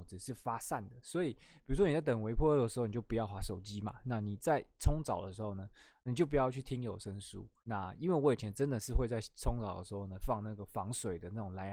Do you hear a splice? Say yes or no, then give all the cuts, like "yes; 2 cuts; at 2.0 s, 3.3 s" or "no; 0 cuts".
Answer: yes; 1 cut; at 7.6 s